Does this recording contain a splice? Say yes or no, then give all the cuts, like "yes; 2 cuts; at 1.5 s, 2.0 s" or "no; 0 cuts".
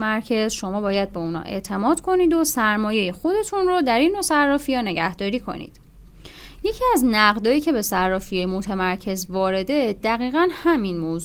no; 0 cuts